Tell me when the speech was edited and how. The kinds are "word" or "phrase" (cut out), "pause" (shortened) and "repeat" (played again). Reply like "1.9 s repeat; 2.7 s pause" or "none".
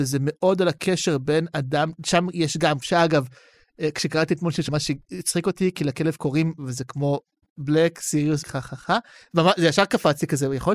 2.8 s word; 4.7 s word; 6.6 s word; 8.4 s word